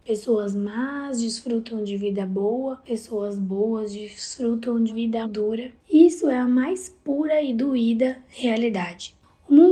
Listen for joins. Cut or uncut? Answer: cut